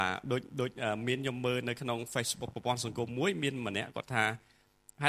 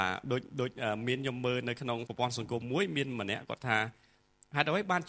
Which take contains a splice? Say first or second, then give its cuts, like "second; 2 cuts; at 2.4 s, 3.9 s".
second; 1 cut; at 2.1 s